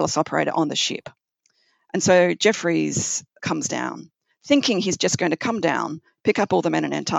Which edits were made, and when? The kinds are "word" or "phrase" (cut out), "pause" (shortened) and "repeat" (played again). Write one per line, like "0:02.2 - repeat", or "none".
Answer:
none